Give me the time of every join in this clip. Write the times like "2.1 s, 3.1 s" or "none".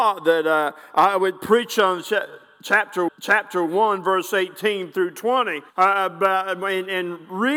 3.1 s, 5.7 s

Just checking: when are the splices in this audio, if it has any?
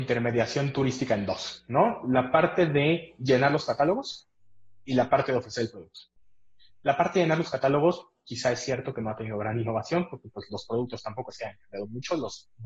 none

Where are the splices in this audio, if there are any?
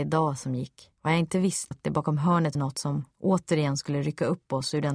1.0 s, 1.7 s, 2.5 s

